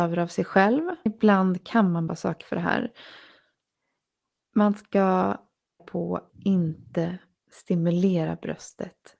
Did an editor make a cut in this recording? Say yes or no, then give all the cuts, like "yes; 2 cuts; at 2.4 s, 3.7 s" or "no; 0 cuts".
yes; 5 cuts; at 1.1 s, 2.1 s, 2.4 s, 5.8 s, 6.3 s